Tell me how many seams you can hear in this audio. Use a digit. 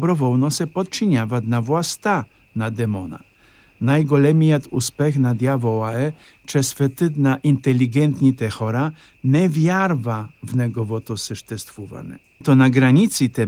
1